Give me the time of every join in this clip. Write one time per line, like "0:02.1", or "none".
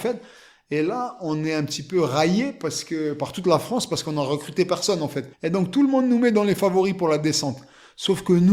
0:05.3